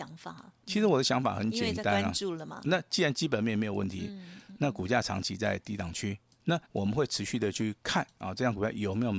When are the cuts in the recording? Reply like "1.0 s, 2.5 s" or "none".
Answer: 2.6 s, 6.6 s